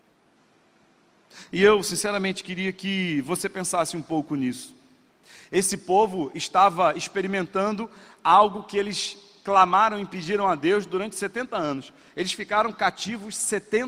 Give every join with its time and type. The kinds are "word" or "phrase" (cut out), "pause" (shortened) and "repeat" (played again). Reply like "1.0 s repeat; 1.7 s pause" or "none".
5.1 s pause